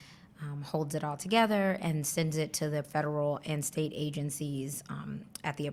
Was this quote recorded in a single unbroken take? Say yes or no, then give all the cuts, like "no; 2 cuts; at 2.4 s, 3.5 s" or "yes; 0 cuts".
no; 1 cut; at 2.8 s